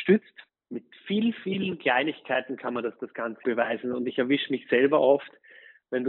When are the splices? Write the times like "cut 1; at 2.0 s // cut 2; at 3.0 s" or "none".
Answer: cut 1; at 3.4 s